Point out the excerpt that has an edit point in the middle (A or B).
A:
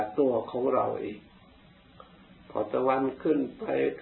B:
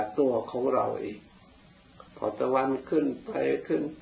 B